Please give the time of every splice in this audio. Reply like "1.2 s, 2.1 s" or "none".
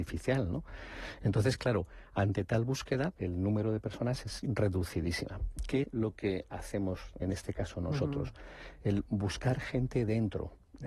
3.2 s, 5.8 s, 7.2 s